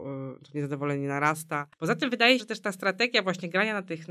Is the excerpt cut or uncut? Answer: cut